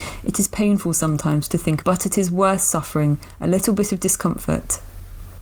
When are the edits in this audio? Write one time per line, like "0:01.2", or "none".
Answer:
0:01.8